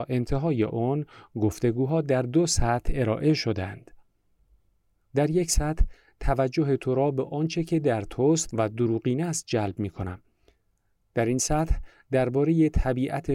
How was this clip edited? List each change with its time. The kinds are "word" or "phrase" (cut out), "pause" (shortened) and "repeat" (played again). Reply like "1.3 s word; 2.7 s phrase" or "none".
none